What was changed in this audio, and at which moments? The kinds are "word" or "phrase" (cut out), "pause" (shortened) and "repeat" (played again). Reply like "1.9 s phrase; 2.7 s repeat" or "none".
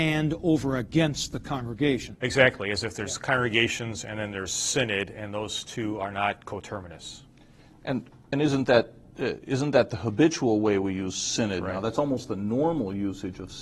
none